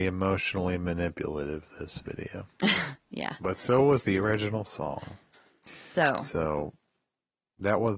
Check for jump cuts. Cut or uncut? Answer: uncut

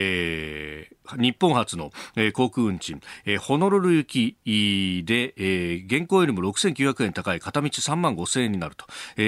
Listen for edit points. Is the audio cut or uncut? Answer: cut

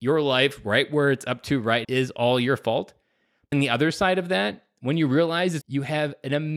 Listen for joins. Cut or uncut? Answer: cut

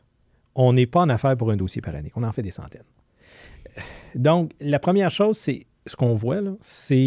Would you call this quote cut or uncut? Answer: uncut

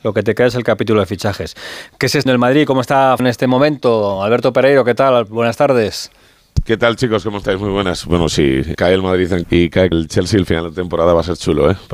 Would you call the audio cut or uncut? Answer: cut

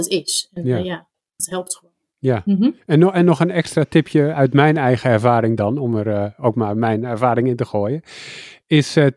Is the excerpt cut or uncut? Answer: uncut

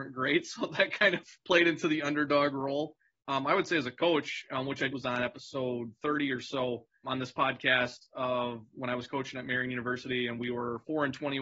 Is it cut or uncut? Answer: cut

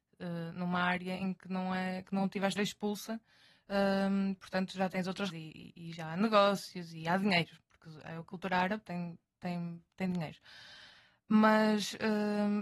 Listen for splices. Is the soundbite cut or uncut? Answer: cut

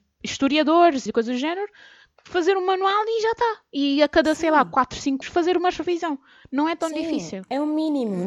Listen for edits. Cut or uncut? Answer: cut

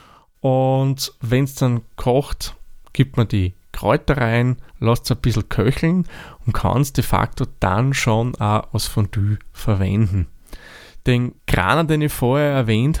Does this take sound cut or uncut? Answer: cut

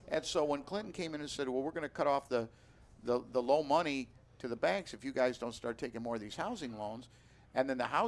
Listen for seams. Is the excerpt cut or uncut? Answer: uncut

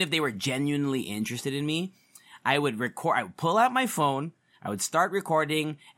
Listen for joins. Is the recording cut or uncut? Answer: uncut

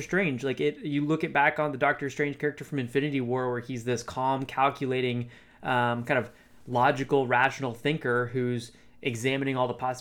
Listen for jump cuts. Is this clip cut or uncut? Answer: uncut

